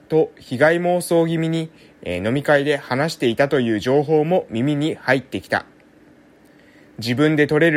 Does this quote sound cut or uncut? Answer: uncut